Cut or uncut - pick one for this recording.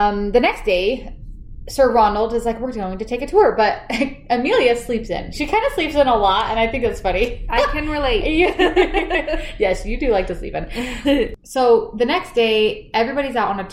uncut